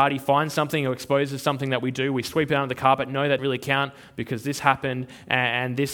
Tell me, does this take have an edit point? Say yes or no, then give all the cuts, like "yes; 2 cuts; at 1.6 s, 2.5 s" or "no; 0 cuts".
yes; 1 cut; at 3.4 s